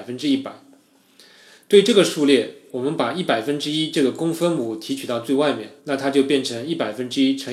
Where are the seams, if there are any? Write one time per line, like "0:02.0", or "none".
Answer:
0:05.8